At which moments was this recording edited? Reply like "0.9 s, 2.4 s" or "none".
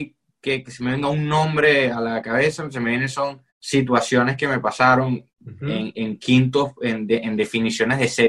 3.5 s, 5.3 s